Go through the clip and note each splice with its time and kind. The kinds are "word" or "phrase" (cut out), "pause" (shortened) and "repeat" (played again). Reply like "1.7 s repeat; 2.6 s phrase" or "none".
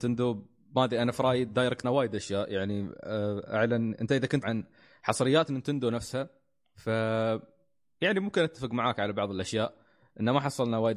1.8 s word; 4.4 s word